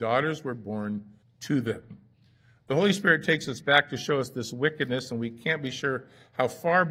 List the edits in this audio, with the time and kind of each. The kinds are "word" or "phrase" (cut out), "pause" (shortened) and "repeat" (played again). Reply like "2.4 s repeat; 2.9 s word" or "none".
1.2 s pause